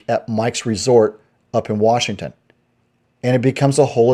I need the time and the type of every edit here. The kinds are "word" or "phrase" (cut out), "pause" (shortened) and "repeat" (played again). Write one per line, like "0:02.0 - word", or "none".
none